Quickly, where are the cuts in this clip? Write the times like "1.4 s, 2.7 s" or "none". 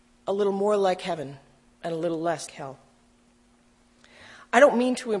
2.5 s